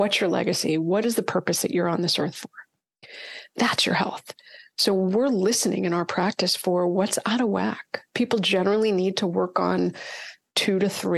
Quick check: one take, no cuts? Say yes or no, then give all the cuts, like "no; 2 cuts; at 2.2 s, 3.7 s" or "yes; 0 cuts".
yes; 0 cuts